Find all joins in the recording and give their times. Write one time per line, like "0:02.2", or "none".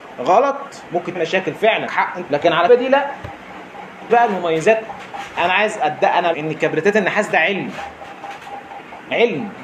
0:01.1
0:01.9
0:02.3
0:02.7
0:04.1
0:05.4
0:06.3